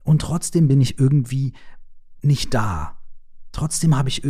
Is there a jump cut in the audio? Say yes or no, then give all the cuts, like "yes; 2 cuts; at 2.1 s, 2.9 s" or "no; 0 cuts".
no; 0 cuts